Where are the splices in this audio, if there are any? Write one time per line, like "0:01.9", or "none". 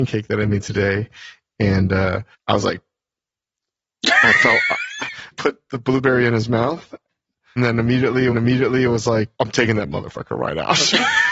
0:02.3
0:05.3
0:07.6
0:08.3
0:09.3